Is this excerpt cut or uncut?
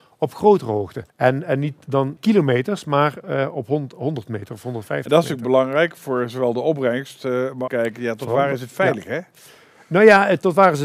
cut